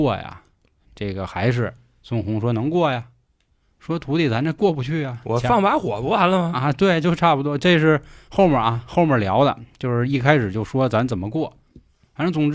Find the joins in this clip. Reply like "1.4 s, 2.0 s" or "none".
none

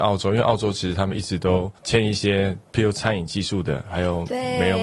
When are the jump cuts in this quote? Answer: 1.8 s, 2.7 s

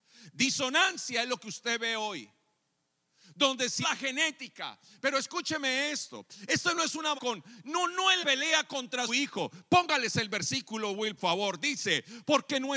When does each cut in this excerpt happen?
3.8 s, 7.2 s, 8.2 s, 9.1 s, 11.2 s

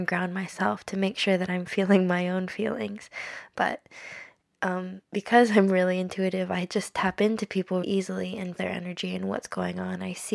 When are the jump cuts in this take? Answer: 5.0 s, 7.8 s, 8.6 s

